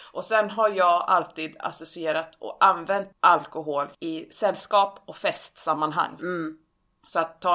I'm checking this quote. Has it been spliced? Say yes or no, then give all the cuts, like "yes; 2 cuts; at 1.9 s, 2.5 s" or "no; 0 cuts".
no; 0 cuts